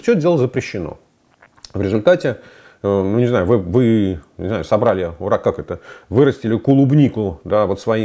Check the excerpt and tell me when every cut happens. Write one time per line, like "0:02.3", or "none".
none

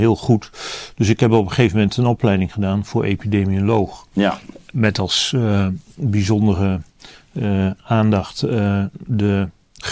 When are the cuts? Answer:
none

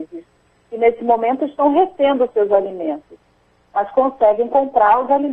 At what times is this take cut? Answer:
none

